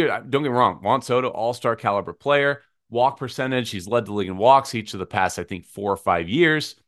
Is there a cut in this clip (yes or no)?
no